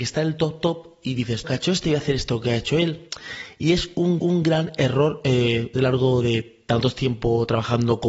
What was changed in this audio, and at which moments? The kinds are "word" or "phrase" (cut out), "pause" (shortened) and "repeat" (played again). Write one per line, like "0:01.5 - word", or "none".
0:01.4 - phrase
0:04.2 - repeat
0:05.7 - phrase